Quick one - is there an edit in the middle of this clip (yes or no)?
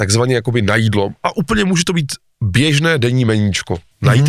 no